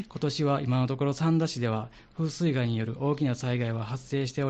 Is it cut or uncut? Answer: uncut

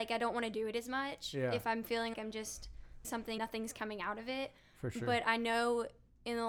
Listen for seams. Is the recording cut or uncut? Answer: cut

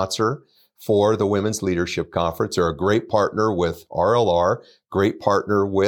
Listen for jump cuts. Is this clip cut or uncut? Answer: uncut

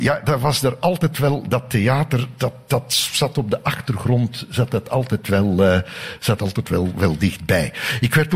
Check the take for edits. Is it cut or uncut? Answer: cut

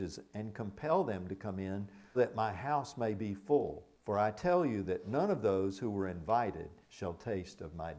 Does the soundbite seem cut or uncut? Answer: cut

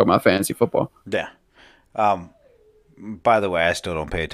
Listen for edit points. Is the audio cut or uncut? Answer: uncut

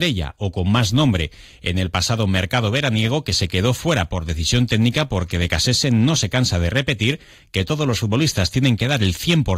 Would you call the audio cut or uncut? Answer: uncut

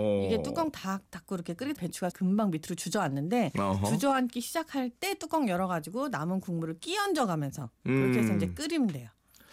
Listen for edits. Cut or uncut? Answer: cut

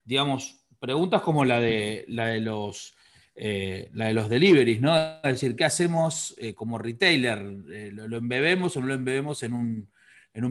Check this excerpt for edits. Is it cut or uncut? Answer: uncut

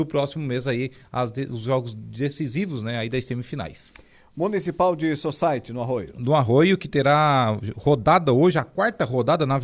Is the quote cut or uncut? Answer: uncut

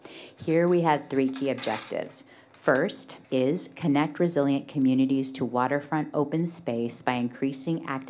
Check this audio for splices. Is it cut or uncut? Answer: cut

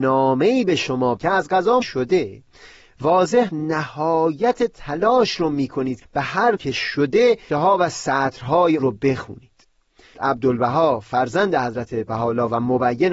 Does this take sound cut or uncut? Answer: cut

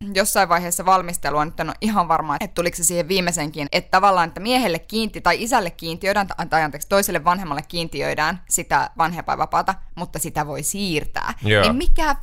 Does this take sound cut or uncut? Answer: cut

